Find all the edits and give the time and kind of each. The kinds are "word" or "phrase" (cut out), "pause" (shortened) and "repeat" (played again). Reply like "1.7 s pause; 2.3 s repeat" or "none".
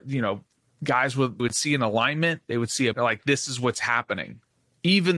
1.4 s word; 2.9 s word